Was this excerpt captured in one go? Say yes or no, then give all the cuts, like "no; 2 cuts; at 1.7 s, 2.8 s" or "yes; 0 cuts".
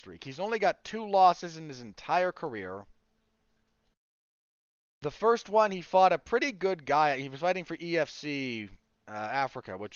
yes; 0 cuts